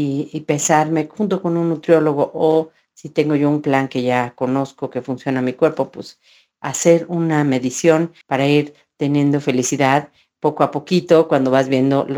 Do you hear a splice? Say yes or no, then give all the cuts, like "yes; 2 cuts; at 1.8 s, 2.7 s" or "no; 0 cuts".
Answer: yes; 1 cut; at 8.2 s